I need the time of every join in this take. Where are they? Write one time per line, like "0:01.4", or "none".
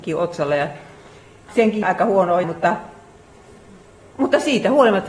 0:01.5
0:01.8
0:02.4